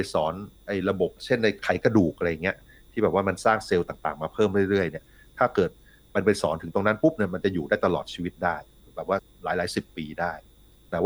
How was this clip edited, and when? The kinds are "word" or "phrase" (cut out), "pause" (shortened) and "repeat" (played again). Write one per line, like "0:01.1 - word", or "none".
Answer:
0:01.2 - pause

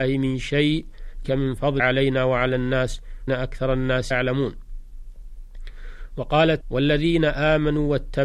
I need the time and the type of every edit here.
0:01.2 - word
0:01.8 - word
0:03.3 - word
0:04.1 - word
0:06.6 - word

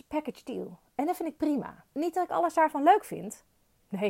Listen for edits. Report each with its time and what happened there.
0:01.9 - pause

